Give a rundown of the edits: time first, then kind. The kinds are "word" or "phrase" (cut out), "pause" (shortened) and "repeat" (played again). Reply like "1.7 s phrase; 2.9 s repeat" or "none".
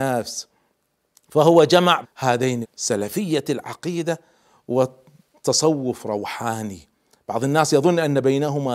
2.0 s word; 2.6 s word